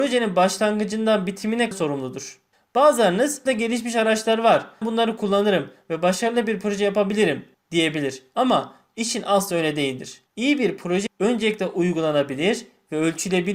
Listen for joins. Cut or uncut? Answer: cut